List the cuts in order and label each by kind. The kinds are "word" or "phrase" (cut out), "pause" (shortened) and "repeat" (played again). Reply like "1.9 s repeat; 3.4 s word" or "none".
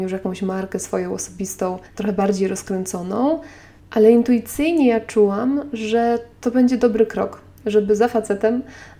1.9 s pause